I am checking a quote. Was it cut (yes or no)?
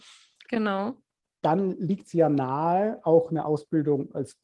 no